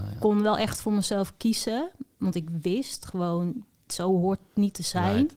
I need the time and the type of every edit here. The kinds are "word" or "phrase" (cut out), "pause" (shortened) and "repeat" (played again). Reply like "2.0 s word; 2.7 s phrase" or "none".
none

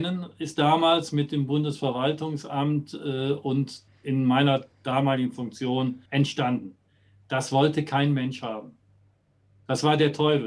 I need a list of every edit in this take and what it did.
3.9 s pause; 4.7 s pause; 6.1 s pause

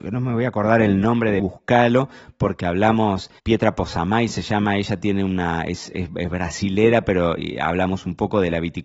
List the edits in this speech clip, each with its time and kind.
1.4 s phrase; 3.4 s pause

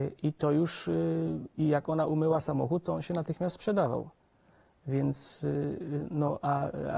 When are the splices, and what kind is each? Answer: 1.5 s word

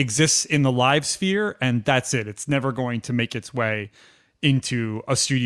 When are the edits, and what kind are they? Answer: none

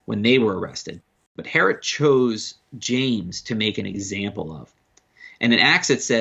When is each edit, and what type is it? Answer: none

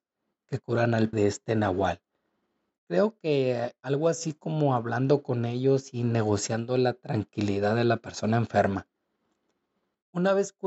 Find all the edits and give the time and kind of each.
1.1 s word

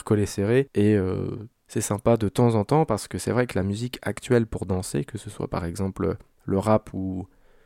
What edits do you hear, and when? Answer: none

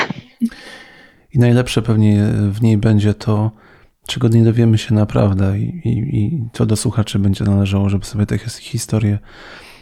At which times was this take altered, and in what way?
none

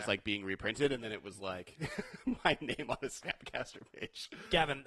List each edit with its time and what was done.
none

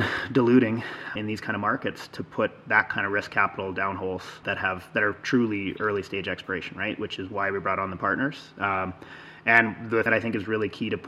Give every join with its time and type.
1.2 s word; 4.4 s word; 10.1 s word

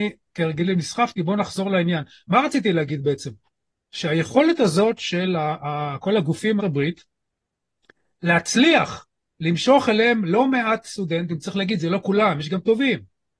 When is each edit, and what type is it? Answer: 6.6 s phrase

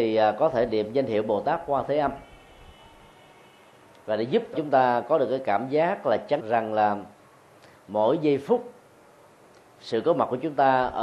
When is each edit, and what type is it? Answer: 4.5 s word; 6.4 s word

